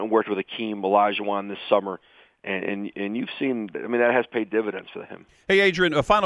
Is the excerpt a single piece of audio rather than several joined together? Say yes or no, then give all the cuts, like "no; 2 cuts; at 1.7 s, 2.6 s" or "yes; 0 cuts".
yes; 0 cuts